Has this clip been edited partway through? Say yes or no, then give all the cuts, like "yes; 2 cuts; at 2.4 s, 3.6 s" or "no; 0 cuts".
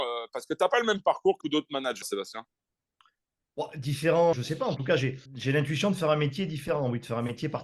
yes; 4 cuts; at 1.4 s, 2.0 s, 4.3 s, 5.3 s